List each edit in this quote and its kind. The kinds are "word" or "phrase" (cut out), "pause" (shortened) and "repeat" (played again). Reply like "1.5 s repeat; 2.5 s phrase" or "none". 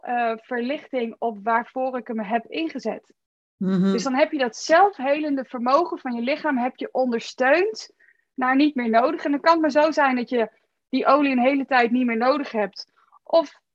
none